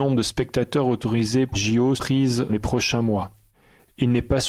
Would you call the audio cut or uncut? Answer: cut